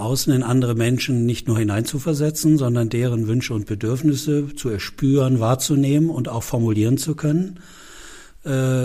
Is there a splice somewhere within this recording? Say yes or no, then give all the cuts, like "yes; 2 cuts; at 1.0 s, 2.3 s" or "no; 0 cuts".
no; 0 cuts